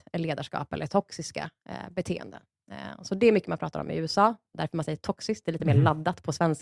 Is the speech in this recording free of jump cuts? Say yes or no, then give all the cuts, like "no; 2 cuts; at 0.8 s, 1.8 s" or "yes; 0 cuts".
yes; 0 cuts